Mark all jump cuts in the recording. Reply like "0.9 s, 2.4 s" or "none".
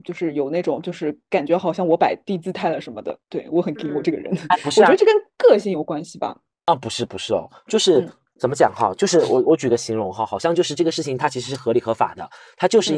none